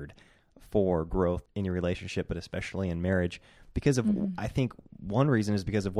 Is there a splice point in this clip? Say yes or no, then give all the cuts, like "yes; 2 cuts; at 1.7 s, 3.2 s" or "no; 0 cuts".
yes; 1 cut; at 1.4 s